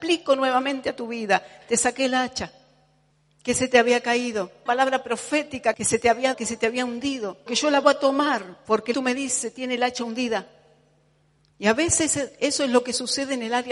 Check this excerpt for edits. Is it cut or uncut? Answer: cut